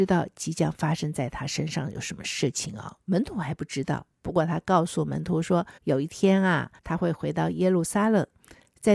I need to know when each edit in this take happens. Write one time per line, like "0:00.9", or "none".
0:05.8
0:06.8